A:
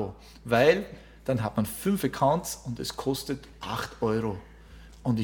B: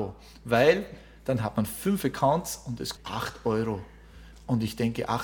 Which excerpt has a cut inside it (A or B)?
B